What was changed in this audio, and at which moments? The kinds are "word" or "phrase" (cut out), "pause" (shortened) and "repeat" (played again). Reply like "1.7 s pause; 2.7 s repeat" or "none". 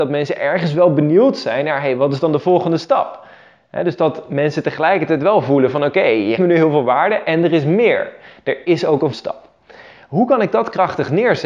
6.4 s word; 9.1 s word